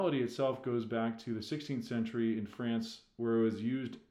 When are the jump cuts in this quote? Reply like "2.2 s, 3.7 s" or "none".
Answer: none